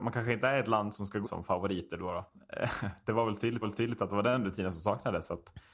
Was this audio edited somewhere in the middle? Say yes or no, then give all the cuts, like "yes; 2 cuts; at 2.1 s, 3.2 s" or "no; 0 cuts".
yes; 2 cuts; at 1.2 s, 3.6 s